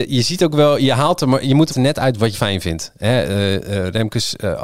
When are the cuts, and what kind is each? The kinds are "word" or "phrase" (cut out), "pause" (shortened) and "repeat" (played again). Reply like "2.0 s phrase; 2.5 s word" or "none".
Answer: 1.7 s phrase; 2.3 s word